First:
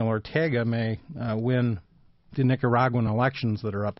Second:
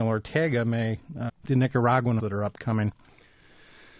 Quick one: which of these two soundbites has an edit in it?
second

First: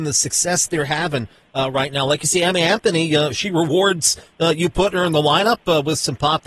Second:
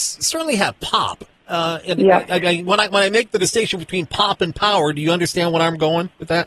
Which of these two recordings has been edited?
second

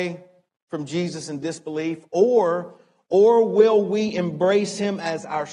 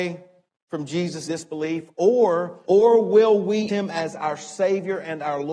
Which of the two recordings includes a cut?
second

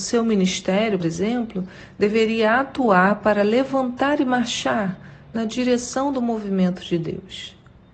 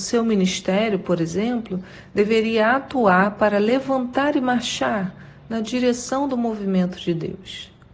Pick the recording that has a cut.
first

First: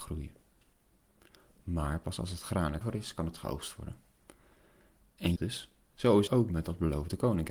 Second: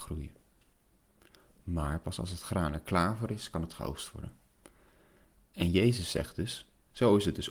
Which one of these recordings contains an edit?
first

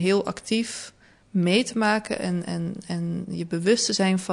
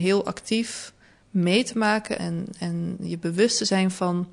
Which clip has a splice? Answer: second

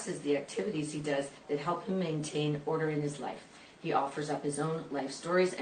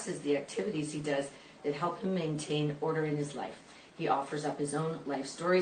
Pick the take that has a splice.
first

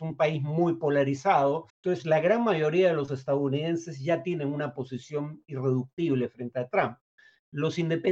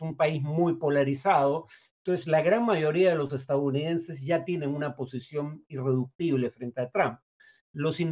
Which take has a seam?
first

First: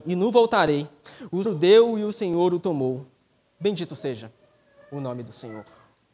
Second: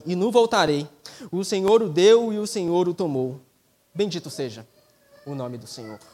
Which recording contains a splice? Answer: first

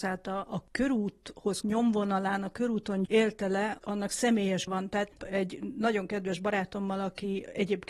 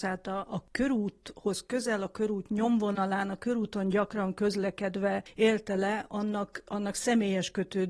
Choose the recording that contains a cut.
first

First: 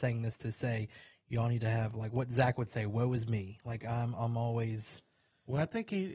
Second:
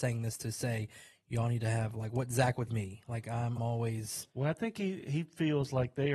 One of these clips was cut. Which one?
second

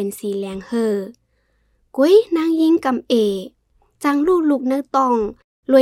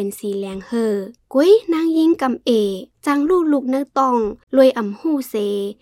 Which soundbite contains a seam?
second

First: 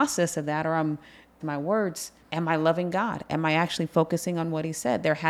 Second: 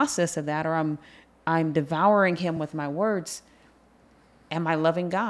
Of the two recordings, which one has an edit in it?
first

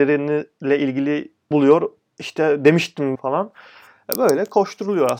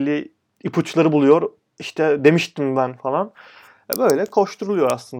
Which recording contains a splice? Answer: first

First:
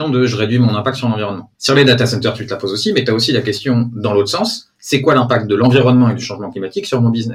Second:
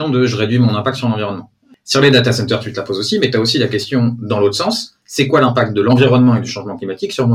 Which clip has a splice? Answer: first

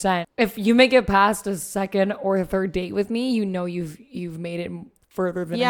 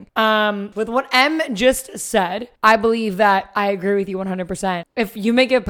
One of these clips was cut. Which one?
second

